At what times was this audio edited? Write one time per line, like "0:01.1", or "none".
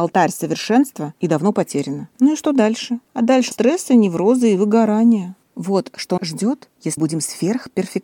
0:02.1
0:03.5
0:06.2
0:07.0